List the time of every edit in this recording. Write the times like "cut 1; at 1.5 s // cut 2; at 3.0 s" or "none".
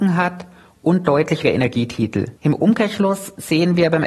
cut 1; at 1.4 s // cut 2; at 2.4 s

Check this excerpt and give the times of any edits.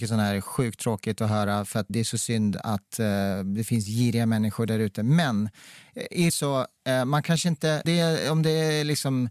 cut 1; at 1.9 s // cut 2; at 6.3 s // cut 3; at 7.8 s

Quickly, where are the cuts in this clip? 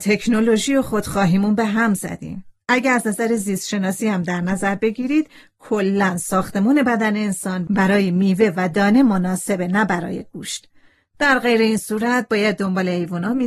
none

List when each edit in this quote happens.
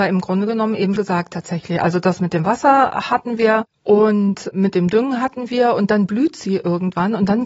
cut 1; at 1.0 s

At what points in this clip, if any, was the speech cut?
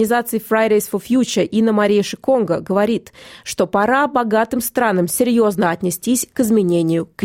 none

